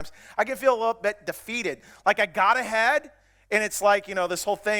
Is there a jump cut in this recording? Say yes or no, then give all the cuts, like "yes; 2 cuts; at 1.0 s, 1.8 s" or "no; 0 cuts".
no; 0 cuts